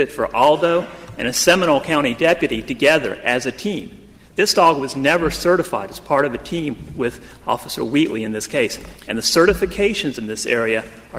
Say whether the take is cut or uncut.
uncut